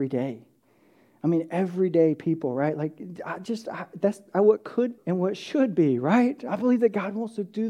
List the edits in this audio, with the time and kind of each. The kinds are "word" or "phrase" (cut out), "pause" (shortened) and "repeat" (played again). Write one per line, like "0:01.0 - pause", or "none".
0:05.0 - word